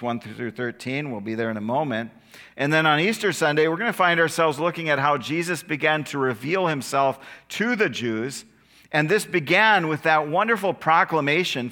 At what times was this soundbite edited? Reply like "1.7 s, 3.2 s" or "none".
none

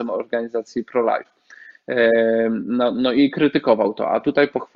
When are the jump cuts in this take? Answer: none

